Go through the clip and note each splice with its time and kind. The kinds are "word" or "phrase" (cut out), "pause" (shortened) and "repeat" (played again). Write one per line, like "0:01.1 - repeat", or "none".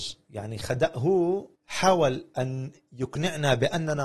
0:01.6 - pause